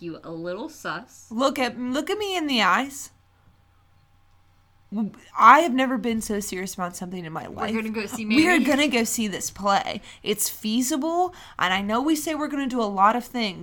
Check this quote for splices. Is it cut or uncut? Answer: uncut